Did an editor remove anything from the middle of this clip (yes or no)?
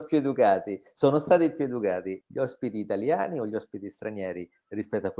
yes